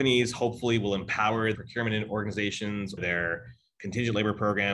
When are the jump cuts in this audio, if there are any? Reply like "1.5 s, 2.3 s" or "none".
1.5 s, 3.0 s